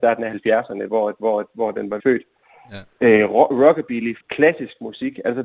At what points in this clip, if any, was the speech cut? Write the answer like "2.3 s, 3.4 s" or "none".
1.2 s, 2.0 s, 4.2 s